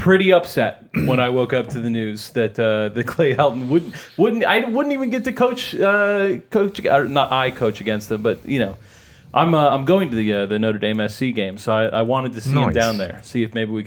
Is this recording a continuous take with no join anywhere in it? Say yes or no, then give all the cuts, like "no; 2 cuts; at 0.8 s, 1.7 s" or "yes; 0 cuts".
yes; 0 cuts